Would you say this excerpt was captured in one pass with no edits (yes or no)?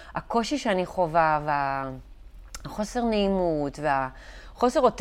yes